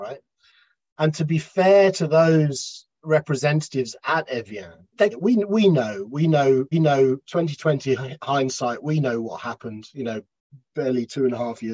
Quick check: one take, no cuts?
no; 2 cuts; at 5.1 s, 6.7 s

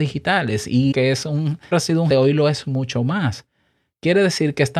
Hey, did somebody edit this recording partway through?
yes; 3 cuts; at 0.9 s, 1.7 s, 2.1 s

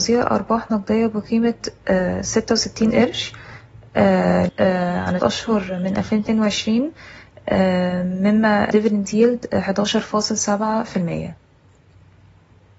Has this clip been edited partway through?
yes; 3 cuts; at 4.5 s, 5.2 s, 8.7 s

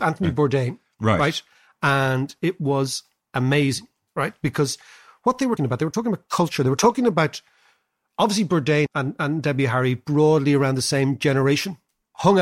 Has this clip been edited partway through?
yes; 2 cuts; at 5.6 s, 8.9 s

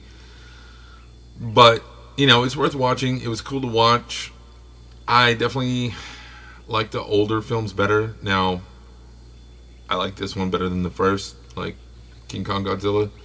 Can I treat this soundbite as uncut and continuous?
yes; 0 cuts

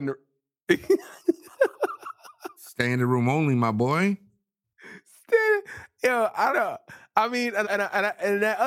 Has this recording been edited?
yes; 2 cuts; at 6.5 s, 7.6 s

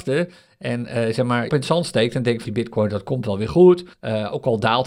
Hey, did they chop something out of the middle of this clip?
yes; 3 cuts; at 1.5 s, 2.5 s, 3.9 s

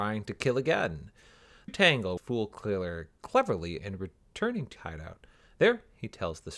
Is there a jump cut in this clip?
yes; 4 cuts; at 1.7 s, 2.2 s, 3.8 s, 4.8 s

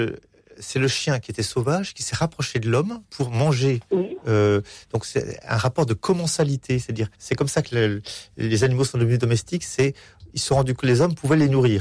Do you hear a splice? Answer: yes; 3 cuts; at 3.1 s, 7.1 s, 10.8 s

